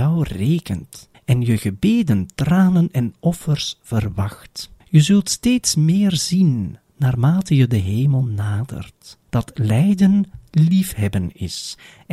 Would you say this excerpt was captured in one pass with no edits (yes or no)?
no